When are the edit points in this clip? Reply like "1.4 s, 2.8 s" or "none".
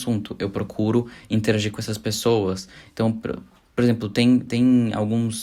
none